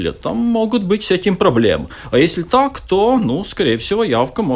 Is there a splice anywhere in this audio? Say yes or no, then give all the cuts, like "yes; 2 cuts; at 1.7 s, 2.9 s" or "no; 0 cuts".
no; 0 cuts